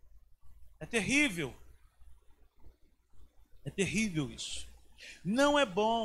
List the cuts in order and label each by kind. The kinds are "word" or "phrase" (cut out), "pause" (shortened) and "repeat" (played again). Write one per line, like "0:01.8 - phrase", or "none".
none